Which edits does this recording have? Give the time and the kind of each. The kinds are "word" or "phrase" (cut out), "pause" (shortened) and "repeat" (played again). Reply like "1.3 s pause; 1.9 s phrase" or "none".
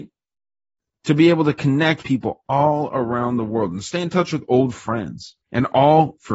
2.0 s word; 5.4 s pause